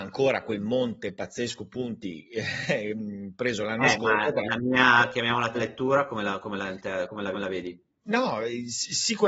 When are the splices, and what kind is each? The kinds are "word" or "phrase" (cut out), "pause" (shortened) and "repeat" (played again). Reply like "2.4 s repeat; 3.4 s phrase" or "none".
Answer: 5.5 s word; 7.3 s repeat